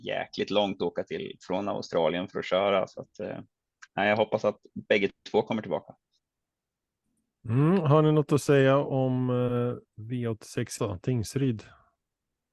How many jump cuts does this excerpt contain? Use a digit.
1